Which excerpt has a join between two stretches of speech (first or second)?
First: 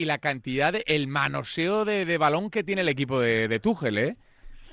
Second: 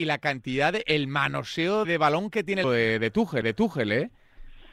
second